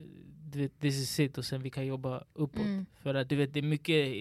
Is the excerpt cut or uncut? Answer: uncut